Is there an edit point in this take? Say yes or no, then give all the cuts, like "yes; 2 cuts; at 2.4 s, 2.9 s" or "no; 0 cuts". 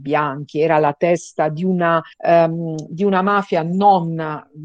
yes; 1 cut; at 2.1 s